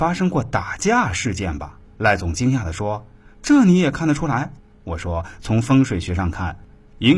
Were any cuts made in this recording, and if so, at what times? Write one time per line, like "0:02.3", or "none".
0:01.8
0:04.6

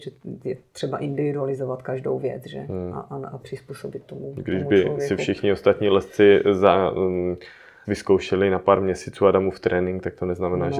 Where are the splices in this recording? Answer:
0:07.8

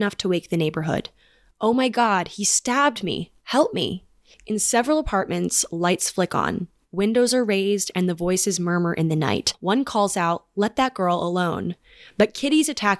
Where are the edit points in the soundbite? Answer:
none

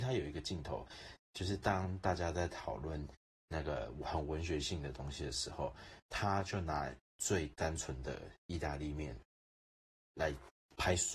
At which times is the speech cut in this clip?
none

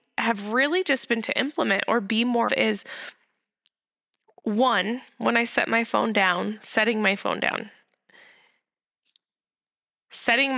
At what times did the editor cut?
0:01.2
0:02.5

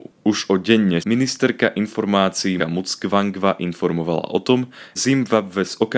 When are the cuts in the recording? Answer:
0:01.0
0:02.6
0:05.0

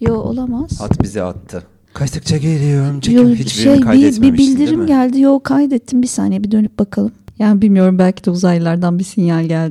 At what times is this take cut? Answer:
none

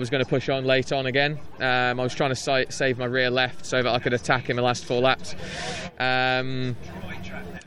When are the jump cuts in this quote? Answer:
none

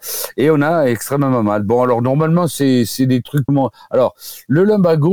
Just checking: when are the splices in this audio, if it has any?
0:03.5

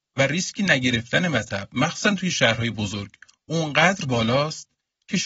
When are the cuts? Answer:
none

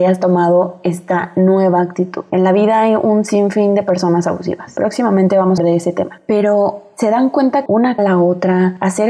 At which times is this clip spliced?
0:05.6
0:07.7
0:08.0

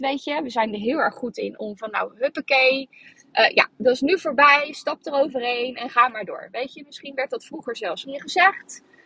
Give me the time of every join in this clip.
0:08.0

